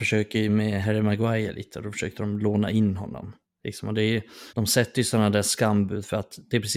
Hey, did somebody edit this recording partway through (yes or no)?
yes